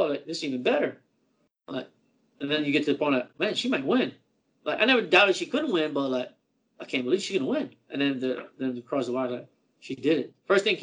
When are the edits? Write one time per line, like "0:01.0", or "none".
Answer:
none